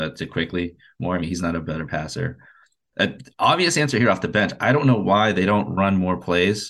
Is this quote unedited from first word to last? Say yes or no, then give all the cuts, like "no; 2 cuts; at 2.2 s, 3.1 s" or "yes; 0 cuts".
yes; 0 cuts